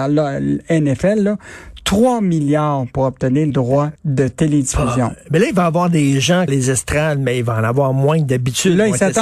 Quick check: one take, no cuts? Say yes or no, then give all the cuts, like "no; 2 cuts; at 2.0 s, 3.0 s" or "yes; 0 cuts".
no; 3 cuts; at 3.5 s, 4.0 s, 6.5 s